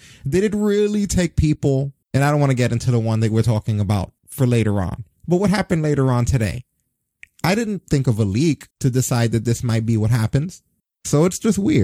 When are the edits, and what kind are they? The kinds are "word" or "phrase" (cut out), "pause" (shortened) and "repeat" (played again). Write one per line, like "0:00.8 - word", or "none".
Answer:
0:02.0 - pause
0:04.2 - pause
0:08.7 - pause